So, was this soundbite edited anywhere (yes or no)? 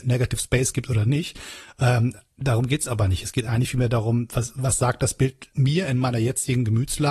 no